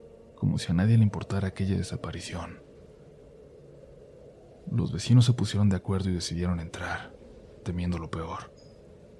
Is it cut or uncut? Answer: uncut